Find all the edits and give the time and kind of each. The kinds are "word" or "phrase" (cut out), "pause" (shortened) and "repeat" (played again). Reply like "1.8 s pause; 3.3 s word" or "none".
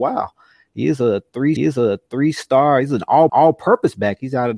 1.6 s repeat; 3.3 s repeat